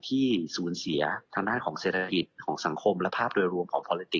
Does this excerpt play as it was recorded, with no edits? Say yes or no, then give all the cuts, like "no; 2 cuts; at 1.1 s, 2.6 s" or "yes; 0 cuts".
no; 1 cut; at 1.3 s